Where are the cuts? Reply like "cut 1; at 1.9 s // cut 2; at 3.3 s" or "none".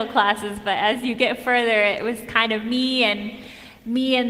none